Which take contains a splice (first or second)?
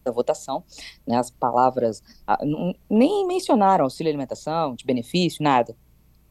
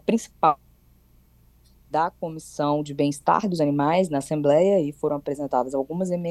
first